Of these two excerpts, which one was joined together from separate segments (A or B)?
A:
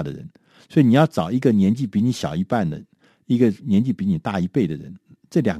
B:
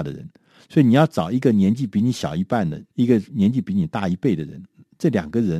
B